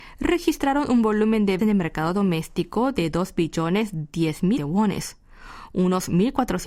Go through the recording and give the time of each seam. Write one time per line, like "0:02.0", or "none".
0:01.6
0:04.6